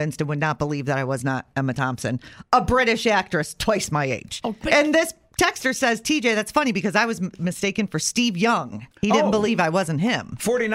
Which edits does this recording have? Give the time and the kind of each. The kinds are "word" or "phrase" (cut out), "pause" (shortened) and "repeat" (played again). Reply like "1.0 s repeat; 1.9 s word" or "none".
4.6 s word; 8.9 s pause